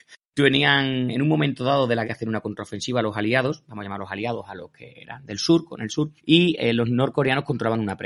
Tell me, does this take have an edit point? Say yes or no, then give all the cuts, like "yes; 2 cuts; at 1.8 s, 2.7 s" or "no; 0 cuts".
yes; 2 cuts; at 2.0 s, 6.2 s